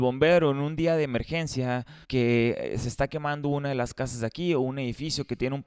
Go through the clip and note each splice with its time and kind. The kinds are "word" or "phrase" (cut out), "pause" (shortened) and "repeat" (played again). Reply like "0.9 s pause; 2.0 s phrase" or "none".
2.0 s pause